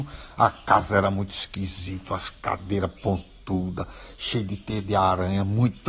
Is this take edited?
no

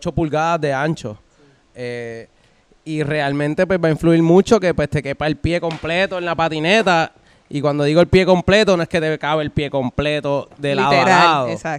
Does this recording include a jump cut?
no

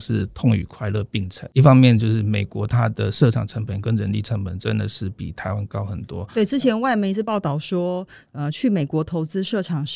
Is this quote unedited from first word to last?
yes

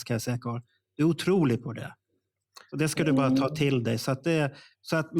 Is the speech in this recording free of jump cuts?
yes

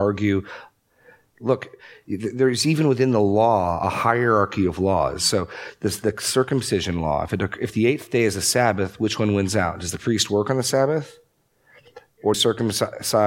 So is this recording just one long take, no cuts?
no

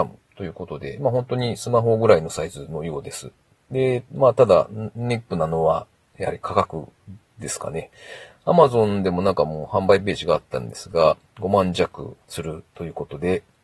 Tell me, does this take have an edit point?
no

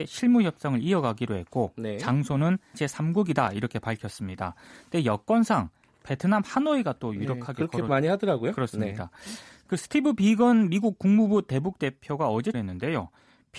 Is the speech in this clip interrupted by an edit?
yes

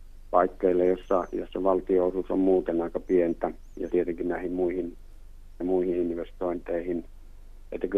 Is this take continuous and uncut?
no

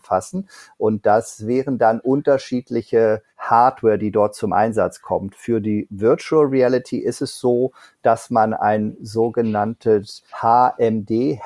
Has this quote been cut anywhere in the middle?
yes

